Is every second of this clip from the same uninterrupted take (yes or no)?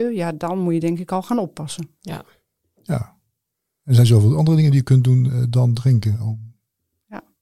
yes